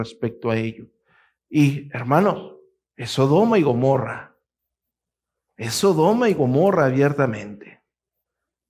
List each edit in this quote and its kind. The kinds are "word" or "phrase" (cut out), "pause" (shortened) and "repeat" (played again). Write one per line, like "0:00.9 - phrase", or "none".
none